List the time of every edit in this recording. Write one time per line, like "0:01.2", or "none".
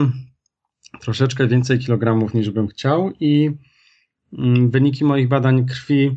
none